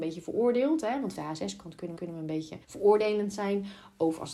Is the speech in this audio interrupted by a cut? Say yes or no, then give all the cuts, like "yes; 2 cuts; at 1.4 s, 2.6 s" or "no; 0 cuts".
yes; 3 cuts; at 1.2 s, 2.0 s, 2.6 s